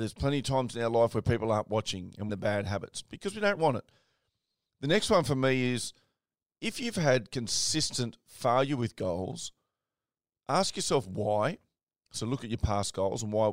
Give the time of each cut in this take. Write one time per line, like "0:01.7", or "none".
0:02.3
0:03.6